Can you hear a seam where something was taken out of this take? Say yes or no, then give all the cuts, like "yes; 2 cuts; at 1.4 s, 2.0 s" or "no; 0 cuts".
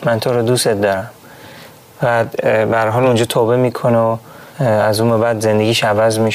yes; 1 cut; at 4.5 s